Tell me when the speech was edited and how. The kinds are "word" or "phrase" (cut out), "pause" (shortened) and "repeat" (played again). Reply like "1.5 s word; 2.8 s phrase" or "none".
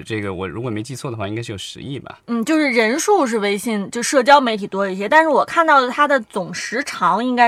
2.2 s pause